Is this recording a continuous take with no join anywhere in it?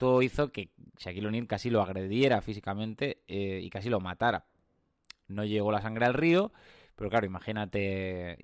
yes; 0 cuts

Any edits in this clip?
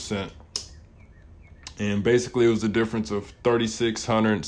no; 0 cuts

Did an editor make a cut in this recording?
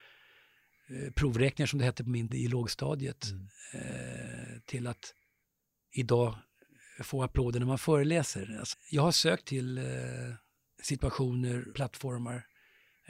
yes; 4 cuts; at 2.3 s, 8.7 s, 9.4 s, 11.7 s

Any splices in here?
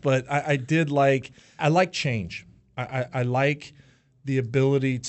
yes; 1 cut; at 1.6 s

